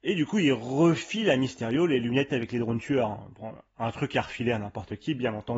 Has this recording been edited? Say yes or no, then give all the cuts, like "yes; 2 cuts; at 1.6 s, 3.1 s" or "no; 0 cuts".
no; 0 cuts